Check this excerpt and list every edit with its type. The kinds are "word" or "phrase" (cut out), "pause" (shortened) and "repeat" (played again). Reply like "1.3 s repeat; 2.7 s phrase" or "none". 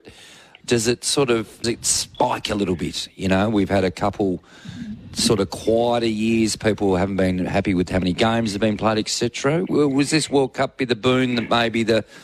1.6 s word